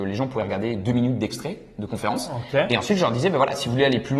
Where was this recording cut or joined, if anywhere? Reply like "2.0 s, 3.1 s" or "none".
none